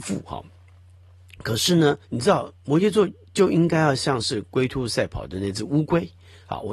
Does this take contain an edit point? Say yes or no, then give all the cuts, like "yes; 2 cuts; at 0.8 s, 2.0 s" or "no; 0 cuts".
yes; 1 cut; at 2.0 s